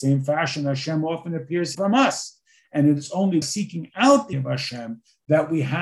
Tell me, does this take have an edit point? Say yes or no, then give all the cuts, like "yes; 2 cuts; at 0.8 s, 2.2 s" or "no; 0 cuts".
yes; 3 cuts; at 1.7 s, 3.4 s, 4.3 s